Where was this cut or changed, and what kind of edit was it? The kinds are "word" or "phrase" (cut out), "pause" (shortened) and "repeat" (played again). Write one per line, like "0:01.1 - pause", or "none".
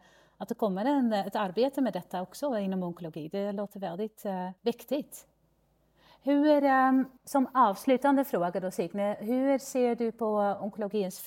0:04.6 - pause
0:07.2 - pause